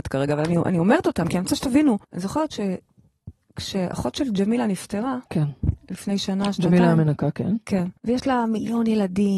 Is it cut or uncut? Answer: cut